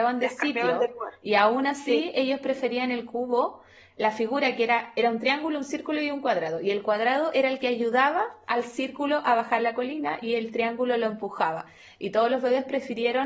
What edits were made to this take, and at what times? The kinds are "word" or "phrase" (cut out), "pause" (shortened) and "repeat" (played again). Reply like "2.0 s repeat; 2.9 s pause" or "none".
none